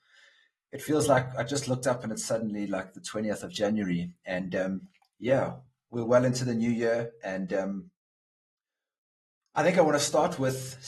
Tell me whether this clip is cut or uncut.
uncut